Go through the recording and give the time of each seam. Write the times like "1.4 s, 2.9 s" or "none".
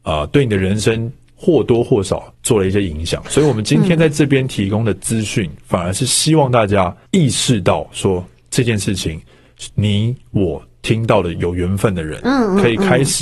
2.3 s, 7.1 s

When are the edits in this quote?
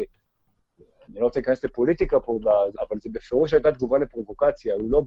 2.8 s

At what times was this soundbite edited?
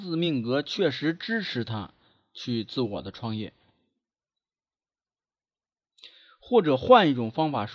none

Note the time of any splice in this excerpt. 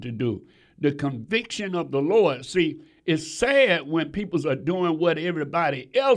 none

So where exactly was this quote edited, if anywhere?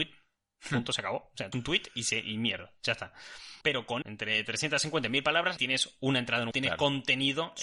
1.5 s, 3.6 s, 4.0 s, 5.6 s, 6.5 s

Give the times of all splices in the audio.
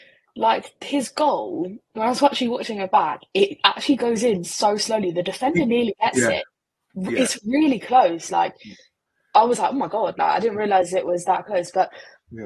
none

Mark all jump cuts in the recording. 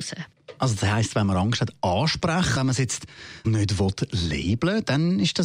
2.6 s, 3.4 s

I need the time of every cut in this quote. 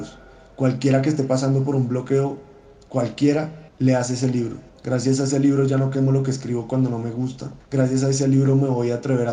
3.7 s, 4.7 s, 7.6 s

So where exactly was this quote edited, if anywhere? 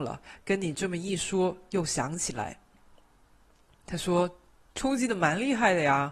none

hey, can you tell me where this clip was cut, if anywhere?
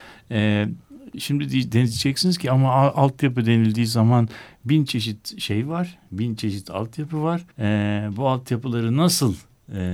7.5 s

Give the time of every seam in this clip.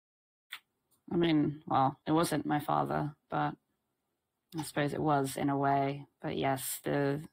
2.0 s, 3.2 s

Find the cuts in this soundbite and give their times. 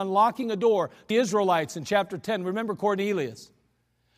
1.1 s

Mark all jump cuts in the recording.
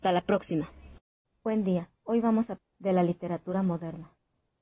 1.2 s, 1.9 s, 2.6 s

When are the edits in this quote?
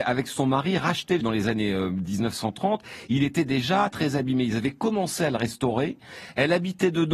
1.2 s, 3.9 s

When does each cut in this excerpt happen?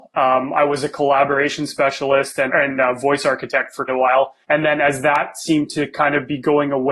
2.5 s, 3.9 s, 4.4 s

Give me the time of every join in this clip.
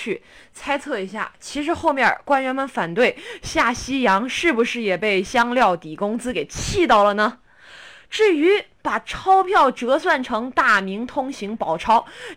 none

